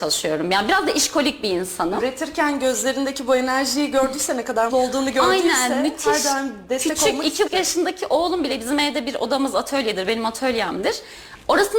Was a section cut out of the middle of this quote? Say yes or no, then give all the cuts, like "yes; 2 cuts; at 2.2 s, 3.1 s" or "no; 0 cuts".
yes; 2 cuts; at 4.7 s, 7.5 s